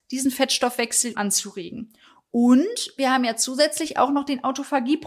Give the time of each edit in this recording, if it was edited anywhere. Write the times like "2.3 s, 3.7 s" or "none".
1.1 s